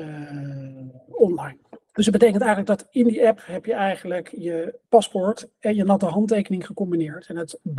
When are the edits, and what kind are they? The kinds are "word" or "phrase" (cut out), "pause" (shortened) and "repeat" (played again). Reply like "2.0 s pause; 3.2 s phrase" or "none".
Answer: 1.8 s pause; 4.8 s pause